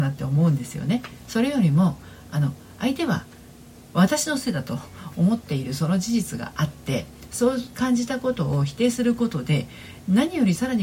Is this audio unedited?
no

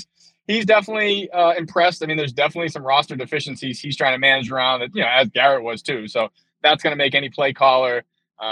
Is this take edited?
no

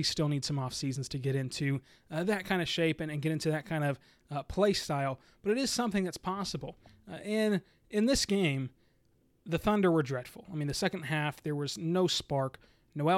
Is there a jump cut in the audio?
no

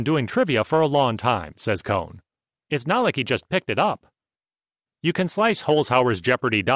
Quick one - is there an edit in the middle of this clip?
no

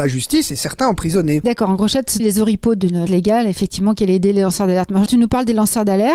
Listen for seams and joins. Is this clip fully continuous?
no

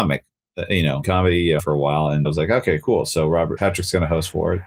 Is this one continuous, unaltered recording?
no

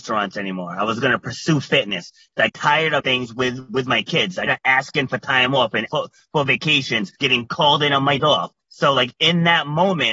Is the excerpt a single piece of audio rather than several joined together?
no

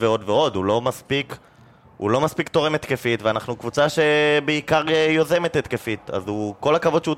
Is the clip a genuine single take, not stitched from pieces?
yes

